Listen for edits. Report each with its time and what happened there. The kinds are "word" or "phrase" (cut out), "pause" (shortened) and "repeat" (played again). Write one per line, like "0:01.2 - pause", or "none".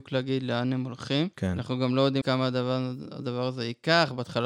0:01.3 - pause
0:02.2 - word